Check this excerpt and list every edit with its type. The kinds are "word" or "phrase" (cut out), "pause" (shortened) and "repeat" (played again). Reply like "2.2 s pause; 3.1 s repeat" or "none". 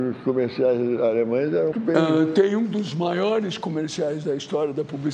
1.7 s phrase